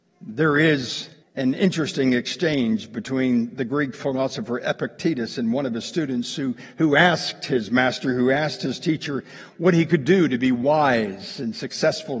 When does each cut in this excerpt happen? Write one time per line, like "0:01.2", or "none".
0:01.2